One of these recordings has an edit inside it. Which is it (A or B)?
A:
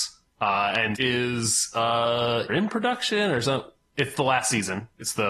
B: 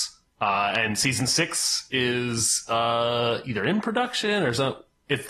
A